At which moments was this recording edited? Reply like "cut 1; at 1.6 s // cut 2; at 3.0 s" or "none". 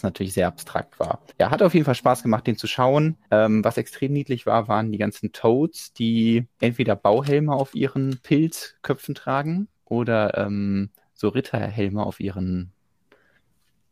cut 1; at 1.3 s // cut 2; at 3.2 s // cut 3; at 6.5 s // cut 4; at 9.8 s